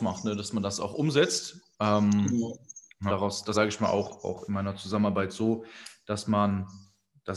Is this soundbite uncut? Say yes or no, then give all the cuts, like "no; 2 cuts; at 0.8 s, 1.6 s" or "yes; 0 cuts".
no; 2 cuts; at 3.1 s, 3.5 s